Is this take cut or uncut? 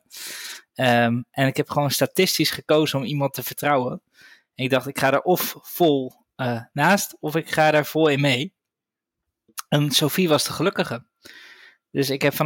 uncut